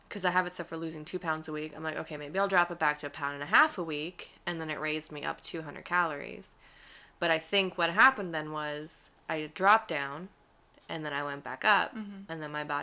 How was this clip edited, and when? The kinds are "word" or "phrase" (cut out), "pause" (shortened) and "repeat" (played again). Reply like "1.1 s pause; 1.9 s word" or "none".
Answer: none